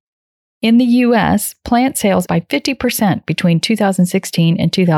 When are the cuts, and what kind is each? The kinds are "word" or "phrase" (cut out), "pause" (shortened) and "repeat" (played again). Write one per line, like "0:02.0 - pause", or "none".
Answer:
0:02.3 - word